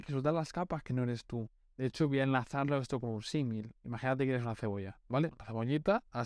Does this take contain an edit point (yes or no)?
no